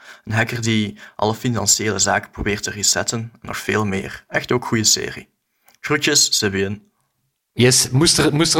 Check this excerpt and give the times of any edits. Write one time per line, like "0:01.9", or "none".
none